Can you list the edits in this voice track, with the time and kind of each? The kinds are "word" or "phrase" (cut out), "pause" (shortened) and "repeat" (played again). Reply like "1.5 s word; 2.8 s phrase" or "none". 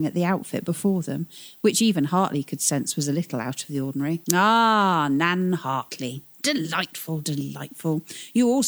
4.2 s pause